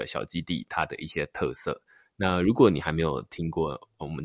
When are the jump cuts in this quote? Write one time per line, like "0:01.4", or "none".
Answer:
none